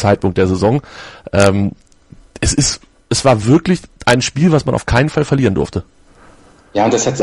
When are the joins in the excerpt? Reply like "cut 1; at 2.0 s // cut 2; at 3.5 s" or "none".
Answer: none